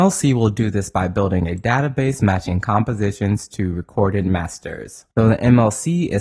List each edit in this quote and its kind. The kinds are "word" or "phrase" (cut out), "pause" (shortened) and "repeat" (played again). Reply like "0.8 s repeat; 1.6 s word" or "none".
5.1 s pause